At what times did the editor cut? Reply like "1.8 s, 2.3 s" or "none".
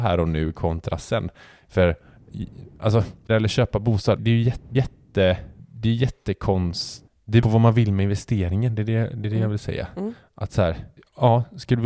3.3 s, 4.2 s, 4.7 s, 7.4 s